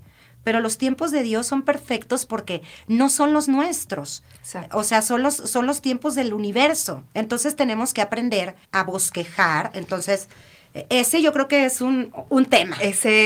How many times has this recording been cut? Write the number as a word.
two